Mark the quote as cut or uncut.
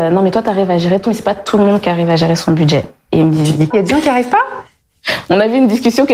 cut